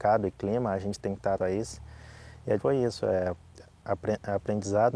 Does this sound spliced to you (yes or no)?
yes